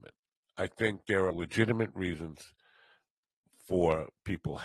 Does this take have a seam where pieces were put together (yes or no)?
yes